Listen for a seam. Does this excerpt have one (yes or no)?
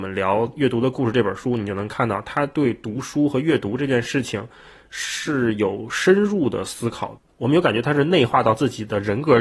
no